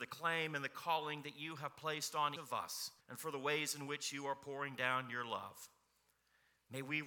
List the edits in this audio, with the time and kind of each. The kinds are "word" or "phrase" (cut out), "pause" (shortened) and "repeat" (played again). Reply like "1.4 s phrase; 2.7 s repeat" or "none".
2.4 s word; 3.0 s pause